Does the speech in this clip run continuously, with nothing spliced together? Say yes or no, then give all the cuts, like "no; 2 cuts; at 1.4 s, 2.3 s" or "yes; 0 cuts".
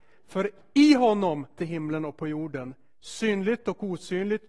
no; 1 cut; at 1.6 s